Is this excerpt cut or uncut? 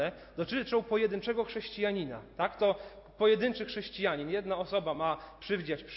uncut